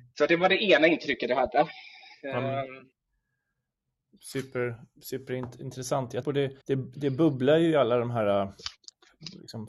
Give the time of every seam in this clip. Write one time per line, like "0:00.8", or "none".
0:06.2
0:06.6